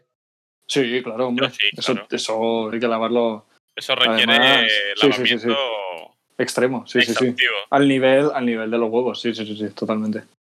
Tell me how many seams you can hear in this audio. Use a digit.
1